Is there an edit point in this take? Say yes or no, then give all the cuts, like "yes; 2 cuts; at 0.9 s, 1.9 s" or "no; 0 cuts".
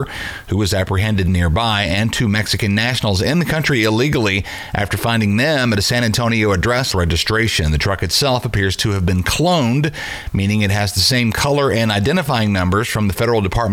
yes; 1 cut; at 6.9 s